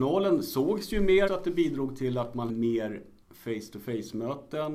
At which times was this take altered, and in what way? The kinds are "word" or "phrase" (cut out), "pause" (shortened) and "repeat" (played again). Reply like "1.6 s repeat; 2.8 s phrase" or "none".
1.3 s phrase; 2.5 s word; 3.2 s pause